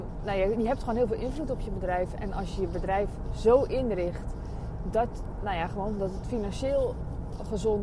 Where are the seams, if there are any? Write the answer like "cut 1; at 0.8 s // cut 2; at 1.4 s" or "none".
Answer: cut 1; at 5.4 s